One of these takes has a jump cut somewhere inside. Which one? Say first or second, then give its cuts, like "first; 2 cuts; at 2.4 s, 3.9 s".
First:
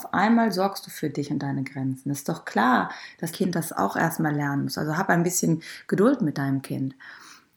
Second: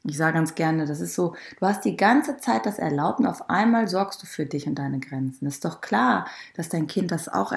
first; 1 cut; at 3.3 s